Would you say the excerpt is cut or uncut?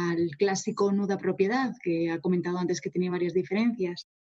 uncut